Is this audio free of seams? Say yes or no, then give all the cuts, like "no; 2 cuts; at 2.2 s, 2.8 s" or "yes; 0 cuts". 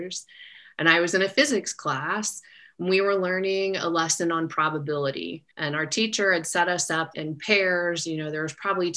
no; 2 cuts; at 5.5 s, 7.1 s